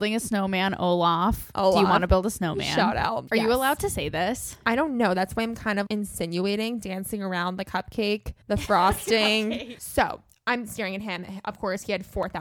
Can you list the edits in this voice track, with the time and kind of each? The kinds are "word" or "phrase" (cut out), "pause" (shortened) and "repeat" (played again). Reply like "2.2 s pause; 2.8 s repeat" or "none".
5.9 s word; 8.4 s pause